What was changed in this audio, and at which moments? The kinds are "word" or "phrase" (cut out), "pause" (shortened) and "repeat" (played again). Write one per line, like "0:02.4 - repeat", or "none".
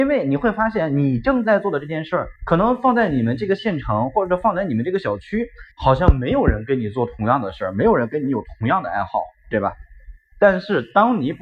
0:02.4 - pause
0:05.7 - pause

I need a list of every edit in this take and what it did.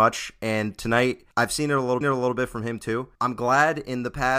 0:01.3 - pause
0:02.0 - repeat
0:03.1 - pause

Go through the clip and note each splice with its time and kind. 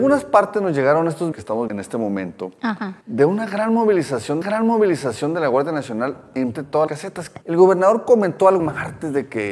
0:01.3 - word
0:01.7 - word
0:03.0 - pause
0:04.4 - repeat
0:06.5 - word
0:06.9 - word
0:07.4 - pause
0:08.6 - word

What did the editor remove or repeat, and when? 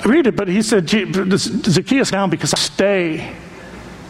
0:02.1 - word
0:02.6 - word

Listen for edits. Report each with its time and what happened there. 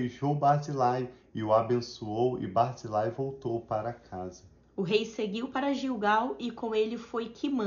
none

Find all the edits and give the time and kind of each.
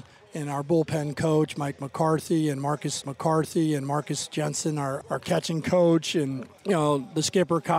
0:03.0 - repeat
0:05.0 - word
0:06.6 - pause

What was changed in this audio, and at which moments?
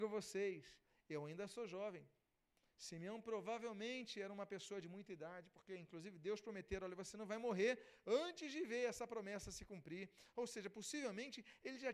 none

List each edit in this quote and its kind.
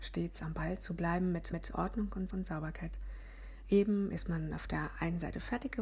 0:01.5 - repeat
0:02.3 - repeat

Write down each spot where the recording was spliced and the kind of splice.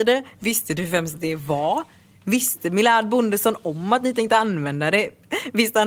none

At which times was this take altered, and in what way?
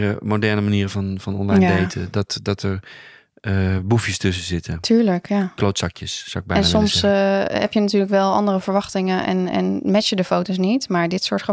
none

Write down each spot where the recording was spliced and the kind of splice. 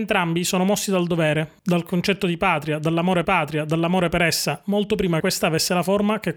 0:03.2 - repeat
0:05.2 - word

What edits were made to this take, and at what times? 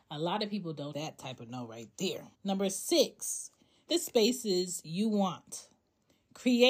0:00.9 - phrase
0:02.3 - pause
0:03.9 - word

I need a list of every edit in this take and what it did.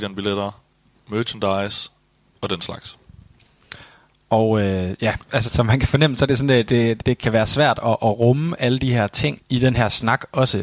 0:05.5 - word
0:06.7 - word
0:07.0 - word
0:09.4 - word

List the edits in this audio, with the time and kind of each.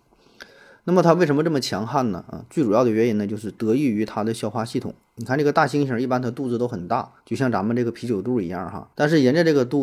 0:07.2 - pause
0:08.9 - pause

